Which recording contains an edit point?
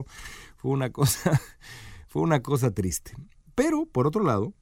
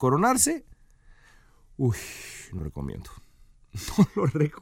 second; 1 cut; at 2.6 s

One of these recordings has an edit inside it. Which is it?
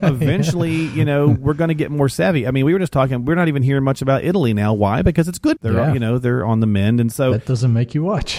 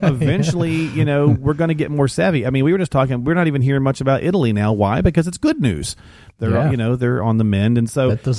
first; 1 cut; at 5.6 s

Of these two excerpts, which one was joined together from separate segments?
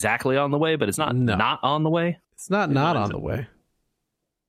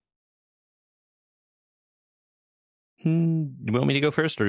first; 1 cut; at 2.2 s

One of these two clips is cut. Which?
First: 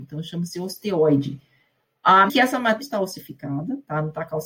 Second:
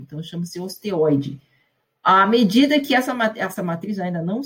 first; 2 cuts; at 2.3 s, 2.8 s

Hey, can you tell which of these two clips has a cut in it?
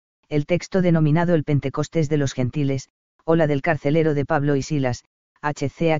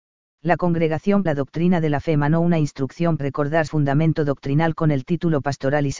second; 3 cuts; at 1.3 s, 3.2 s, 3.7 s

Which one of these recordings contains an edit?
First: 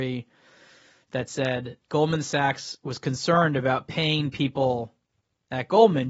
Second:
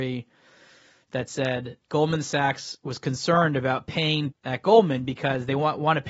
second; 1 cut; at 4.3 s

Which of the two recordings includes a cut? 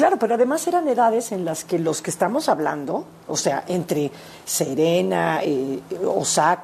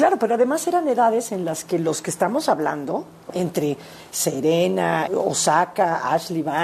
second; 2 cuts; at 3.3 s, 5.1 s

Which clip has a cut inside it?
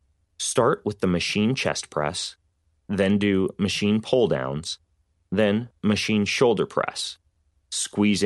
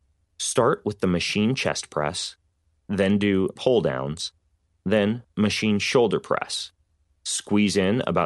second; 1 cut; at 3.6 s

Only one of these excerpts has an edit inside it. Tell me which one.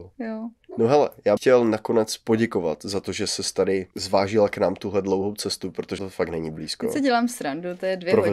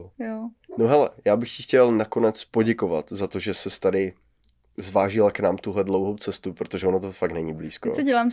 first; 3 cuts; at 1.4 s, 3.9 s, 6.0 s

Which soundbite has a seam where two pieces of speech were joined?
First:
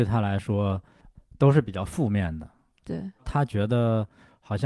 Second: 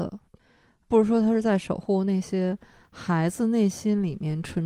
first; 1 cut; at 3.2 s

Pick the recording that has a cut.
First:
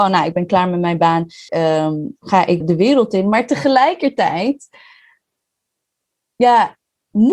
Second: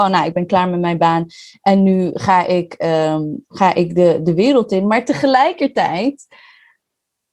first; 2 cuts; at 1.5 s, 2.6 s

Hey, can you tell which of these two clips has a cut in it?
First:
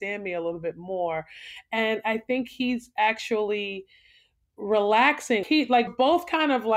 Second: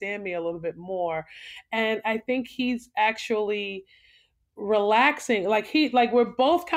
first; 2 cuts; at 5.4 s, 5.9 s

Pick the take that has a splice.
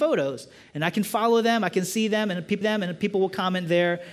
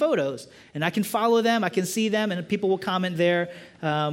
first; 1 cut; at 2.6 s

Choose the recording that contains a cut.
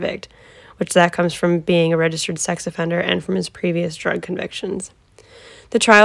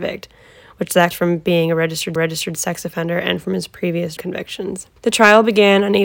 second; 4 cuts; at 1.1 s, 2.2 s, 4.2 s, 5.0 s

